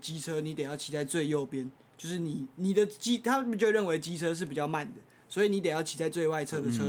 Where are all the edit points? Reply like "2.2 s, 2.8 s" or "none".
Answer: none